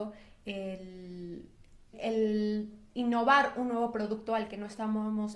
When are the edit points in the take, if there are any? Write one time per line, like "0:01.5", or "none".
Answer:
0:01.9